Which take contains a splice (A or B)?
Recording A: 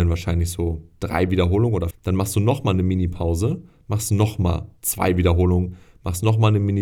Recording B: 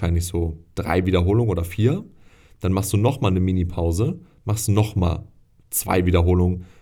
A